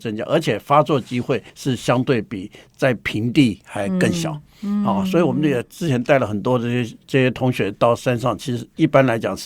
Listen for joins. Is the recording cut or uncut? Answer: cut